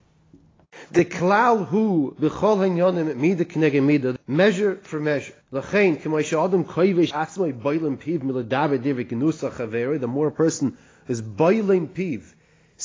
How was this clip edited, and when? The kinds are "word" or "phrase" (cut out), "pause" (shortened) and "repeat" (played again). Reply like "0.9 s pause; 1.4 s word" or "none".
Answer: 4.2 s phrase; 5.4 s pause; 7.1 s word